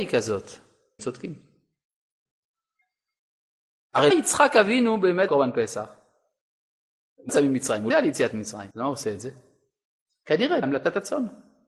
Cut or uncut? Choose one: cut